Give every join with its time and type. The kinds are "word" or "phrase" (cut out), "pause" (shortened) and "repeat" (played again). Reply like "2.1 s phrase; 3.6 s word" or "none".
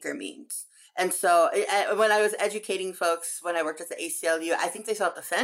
none